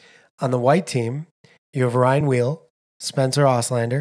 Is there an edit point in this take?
no; 0 cuts

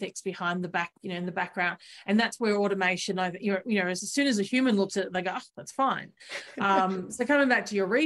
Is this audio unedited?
no; 1 cut; at 6.2 s

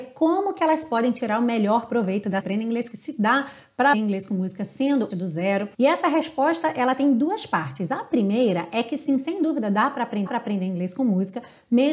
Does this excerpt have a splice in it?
yes; 6 cuts; at 2.4 s, 2.9 s, 3.9 s, 5.1 s, 5.7 s, 10.3 s

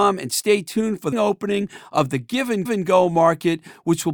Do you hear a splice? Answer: yes; 2 cuts; at 1.1 s, 2.7 s

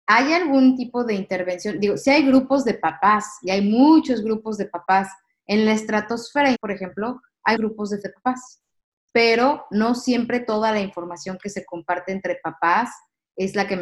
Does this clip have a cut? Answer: yes; 3 cuts; at 6.5 s, 7.6 s, 8.0 s

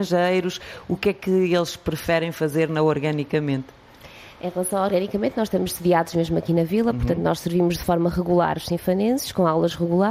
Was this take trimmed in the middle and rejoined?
no; 0 cuts

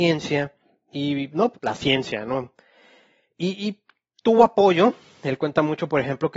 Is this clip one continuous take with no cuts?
no; 1 cut; at 1.5 s

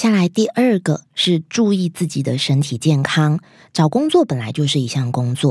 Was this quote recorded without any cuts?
yes; 0 cuts

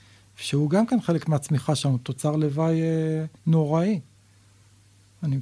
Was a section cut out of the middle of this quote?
yes; 1 cut; at 3.4 s

